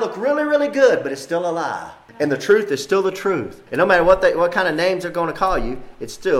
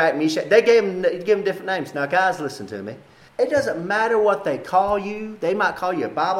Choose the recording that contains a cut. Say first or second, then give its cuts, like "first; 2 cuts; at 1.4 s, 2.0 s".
first; 1 cut; at 3.7 s